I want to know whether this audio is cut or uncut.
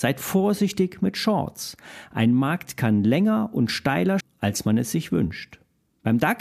cut